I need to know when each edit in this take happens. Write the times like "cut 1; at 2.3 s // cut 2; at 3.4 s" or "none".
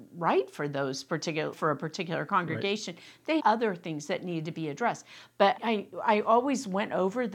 cut 1; at 1.5 s // cut 2; at 3.4 s // cut 3; at 5.6 s